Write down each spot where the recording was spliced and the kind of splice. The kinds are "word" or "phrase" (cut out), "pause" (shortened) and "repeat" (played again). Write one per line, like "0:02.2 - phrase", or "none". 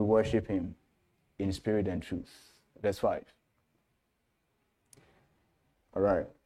none